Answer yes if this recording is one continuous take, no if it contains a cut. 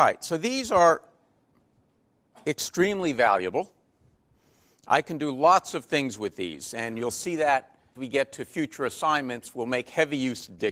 no